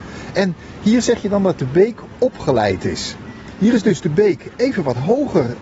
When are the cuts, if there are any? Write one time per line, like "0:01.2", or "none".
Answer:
none